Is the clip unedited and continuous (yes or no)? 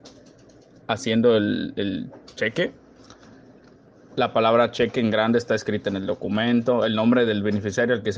yes